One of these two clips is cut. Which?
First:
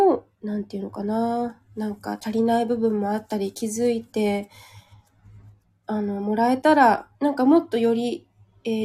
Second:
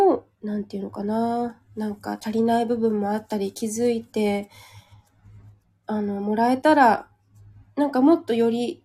first; 1 cut; at 7.1 s

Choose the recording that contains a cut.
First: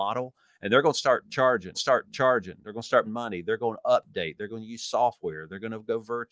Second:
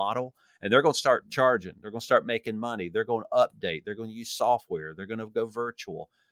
first; 2 cuts; at 1.7 s, 3.0 s

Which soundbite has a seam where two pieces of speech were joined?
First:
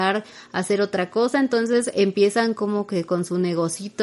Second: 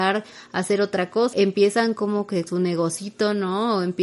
second; 2 cuts; at 1.3 s, 2.5 s

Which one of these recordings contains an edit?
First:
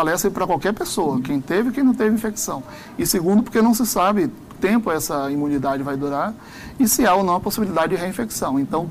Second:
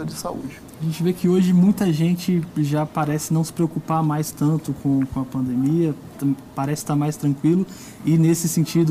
first; 1 cut; at 4.5 s

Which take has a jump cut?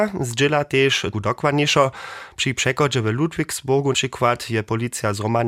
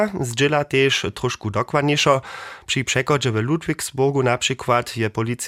first; 2 cuts; at 1.1 s, 3.9 s

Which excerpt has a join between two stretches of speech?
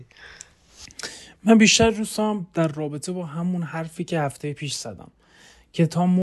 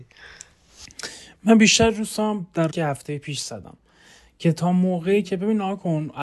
second; 1 cut; at 2.7 s

